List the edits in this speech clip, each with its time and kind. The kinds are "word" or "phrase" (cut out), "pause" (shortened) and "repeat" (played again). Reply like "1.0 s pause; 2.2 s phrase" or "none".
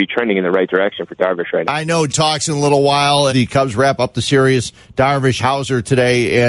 1.6 s word; 2.1 s word; 3.3 s word; 5.4 s word